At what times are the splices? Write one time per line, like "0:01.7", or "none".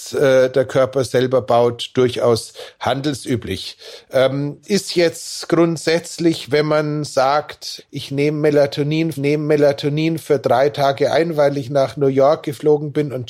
0:04.6
0:07.8
0:09.1